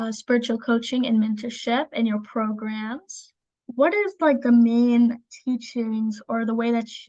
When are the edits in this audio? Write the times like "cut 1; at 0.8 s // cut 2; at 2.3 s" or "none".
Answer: none